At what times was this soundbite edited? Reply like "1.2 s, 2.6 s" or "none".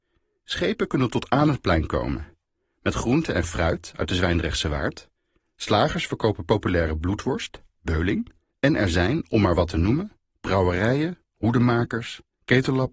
none